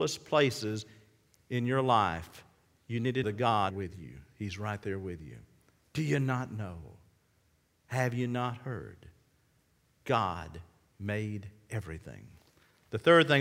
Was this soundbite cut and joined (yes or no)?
yes